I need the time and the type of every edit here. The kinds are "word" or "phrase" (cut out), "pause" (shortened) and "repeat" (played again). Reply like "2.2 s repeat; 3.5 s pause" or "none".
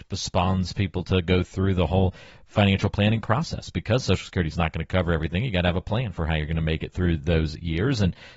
none